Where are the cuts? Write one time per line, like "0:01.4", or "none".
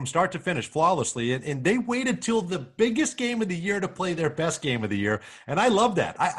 none

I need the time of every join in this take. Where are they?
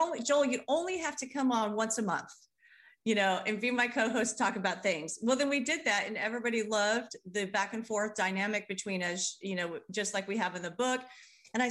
none

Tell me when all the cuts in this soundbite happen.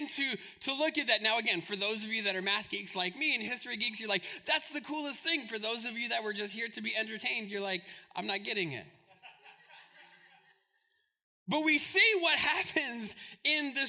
none

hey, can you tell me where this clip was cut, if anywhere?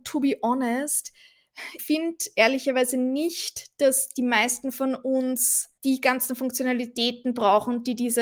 0:01.8
0:05.8

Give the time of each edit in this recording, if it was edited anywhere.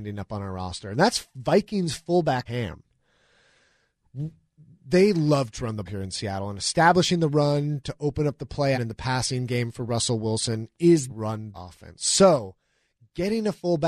0:02.5
0:05.9
0:08.7
0:11.1
0:11.5

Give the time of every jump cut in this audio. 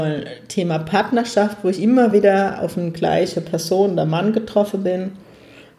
none

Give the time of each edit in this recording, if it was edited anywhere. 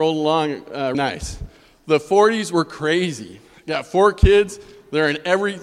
0:00.9

